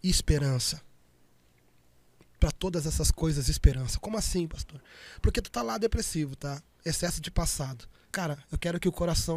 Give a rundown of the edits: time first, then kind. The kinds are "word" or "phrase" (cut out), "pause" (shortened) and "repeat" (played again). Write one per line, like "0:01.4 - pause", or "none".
none